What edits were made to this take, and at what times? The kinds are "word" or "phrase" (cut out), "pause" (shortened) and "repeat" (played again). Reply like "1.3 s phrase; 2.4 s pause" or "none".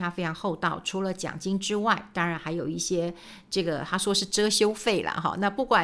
none